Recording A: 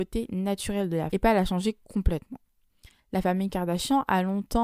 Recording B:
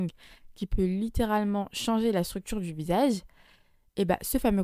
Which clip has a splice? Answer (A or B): A